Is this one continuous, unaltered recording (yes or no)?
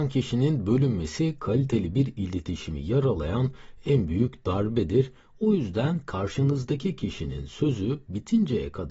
yes